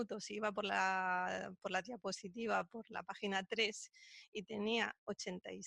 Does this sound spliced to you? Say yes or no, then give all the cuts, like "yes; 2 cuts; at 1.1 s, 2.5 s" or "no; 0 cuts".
no; 0 cuts